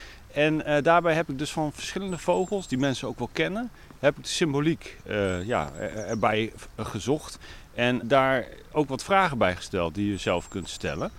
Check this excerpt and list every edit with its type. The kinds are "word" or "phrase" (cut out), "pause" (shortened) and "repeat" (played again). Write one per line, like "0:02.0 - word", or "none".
0:08.0 - word